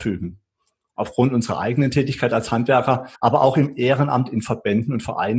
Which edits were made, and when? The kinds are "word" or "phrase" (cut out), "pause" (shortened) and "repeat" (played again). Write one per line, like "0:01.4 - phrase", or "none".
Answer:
0:03.1 - pause

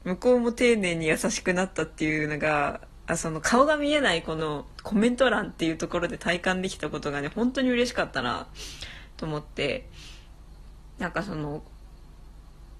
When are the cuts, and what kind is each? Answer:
0:04.4 - word

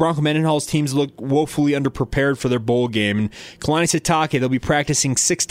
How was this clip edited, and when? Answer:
none

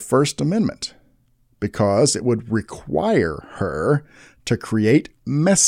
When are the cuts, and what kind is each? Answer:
none

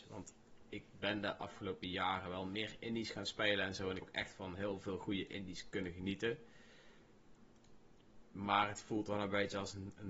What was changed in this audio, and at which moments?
0:04.0 - word

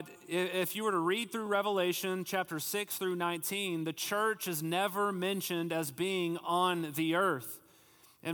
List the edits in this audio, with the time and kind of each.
none

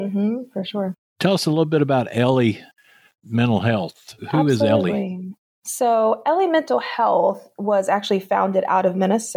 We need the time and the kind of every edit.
none

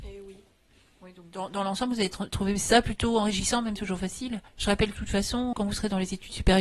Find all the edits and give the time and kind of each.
0:03.8 - phrase
0:04.5 - pause
0:04.9 - word
0:05.5 - word

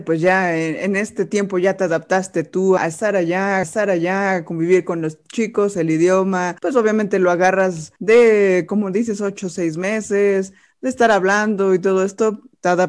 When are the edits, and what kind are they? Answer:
0:02.8 - word
0:03.6 - repeat
0:06.6 - pause
0:08.0 - pause

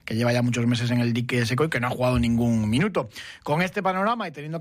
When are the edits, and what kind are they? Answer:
none

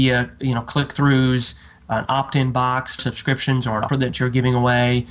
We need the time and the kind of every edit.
0:03.0 - phrase
0:03.9 - word

